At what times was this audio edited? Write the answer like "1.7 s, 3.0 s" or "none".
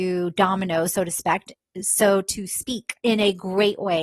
3.0 s